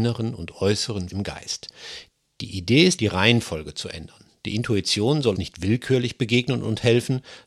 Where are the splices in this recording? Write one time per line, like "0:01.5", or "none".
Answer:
0:01.1
0:03.0
0:05.3